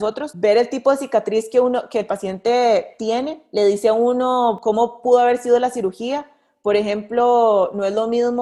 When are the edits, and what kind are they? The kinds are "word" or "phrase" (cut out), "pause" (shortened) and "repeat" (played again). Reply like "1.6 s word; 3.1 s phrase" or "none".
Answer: none